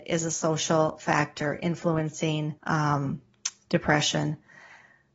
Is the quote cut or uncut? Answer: cut